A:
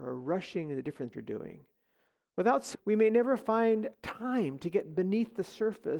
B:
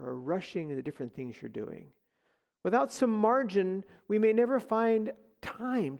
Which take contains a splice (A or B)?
A